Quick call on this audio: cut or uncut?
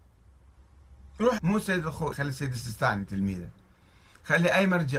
cut